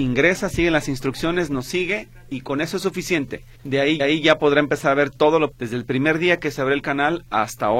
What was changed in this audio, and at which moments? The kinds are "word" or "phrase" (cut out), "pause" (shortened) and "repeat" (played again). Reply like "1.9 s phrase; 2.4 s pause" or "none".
3.5 s pause; 4.0 s repeat; 5.5 s word